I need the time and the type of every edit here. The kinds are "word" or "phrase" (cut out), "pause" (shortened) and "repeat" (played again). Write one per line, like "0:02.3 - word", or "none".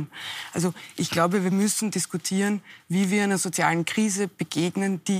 0:01.9 - word